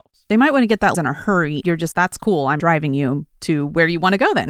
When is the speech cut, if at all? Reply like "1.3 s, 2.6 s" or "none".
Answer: 0.9 s, 1.6 s, 1.9 s, 2.6 s